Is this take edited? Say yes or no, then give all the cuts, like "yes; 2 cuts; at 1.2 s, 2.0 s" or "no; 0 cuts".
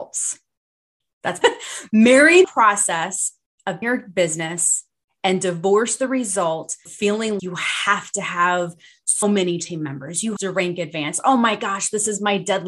yes; 8 cuts; at 1.0 s, 1.4 s, 2.4 s, 3.8 s, 6.9 s, 7.4 s, 9.2 s, 10.4 s